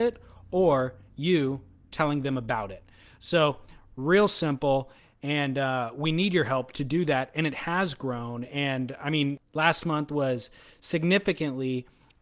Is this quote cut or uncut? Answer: uncut